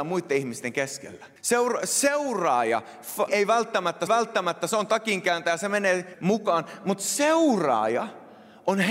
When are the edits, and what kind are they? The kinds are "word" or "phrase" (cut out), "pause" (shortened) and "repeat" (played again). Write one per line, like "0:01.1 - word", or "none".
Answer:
0:01.4 - pause
0:03.3 - word
0:04.1 - repeat
0:06.1 - word